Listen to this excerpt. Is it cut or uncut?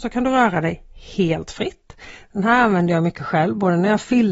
uncut